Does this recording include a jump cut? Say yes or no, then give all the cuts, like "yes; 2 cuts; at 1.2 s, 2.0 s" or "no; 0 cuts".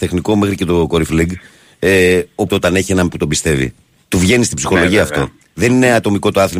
yes; 4 cuts; at 1.1 s, 2.5 s, 3.1 s, 4.0 s